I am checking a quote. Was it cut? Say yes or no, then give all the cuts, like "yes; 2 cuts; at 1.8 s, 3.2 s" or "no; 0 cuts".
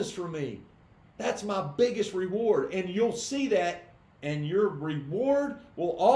no; 0 cuts